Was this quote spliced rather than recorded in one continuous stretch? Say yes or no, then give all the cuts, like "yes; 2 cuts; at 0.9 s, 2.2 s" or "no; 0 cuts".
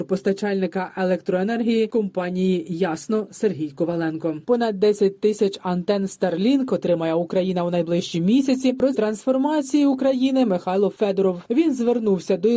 yes; 2 cuts; at 4.4 s, 8.9 s